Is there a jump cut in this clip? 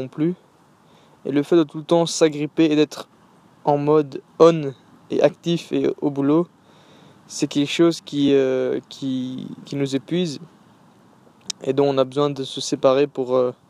no; 0 cuts

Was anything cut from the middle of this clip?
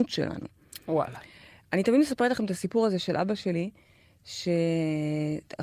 no; 0 cuts

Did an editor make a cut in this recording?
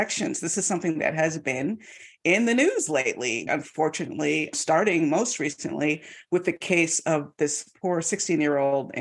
yes; 1 cut; at 3.5 s

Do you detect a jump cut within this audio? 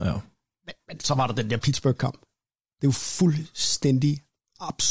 no; 0 cuts

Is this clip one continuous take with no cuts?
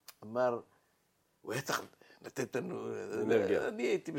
yes; 0 cuts

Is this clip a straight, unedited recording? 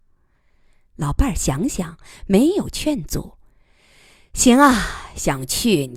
yes; 0 cuts

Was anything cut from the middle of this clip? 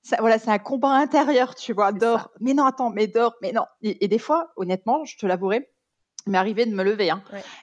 no; 0 cuts

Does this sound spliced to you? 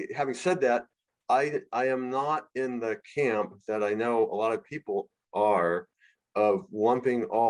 no; 0 cuts

